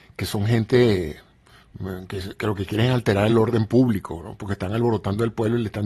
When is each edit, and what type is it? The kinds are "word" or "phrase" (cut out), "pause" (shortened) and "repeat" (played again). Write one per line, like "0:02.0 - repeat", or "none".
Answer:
none